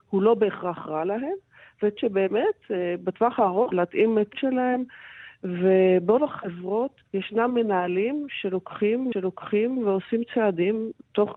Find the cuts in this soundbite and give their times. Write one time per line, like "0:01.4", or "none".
0:02.0
0:03.7
0:04.3
0:06.2
0:07.1
0:09.1